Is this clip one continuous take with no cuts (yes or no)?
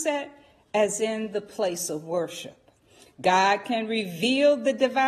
yes